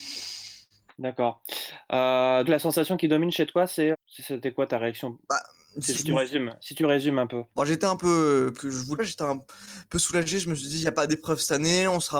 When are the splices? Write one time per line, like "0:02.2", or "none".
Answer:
0:02.4
0:03.9
0:05.2
0:05.9
0:07.5
0:08.6
0:09.0